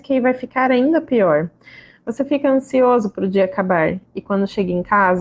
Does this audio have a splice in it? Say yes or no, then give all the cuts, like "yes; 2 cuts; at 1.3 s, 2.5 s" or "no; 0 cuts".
no; 0 cuts